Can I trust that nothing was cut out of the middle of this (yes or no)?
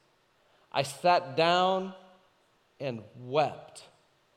yes